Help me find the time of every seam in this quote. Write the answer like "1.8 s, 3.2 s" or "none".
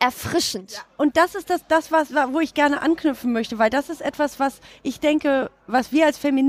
none